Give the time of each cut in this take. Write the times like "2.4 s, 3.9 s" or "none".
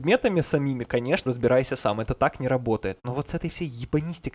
1.3 s